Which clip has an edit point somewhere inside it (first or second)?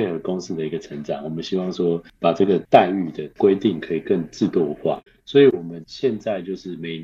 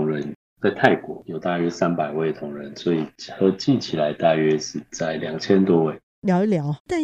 first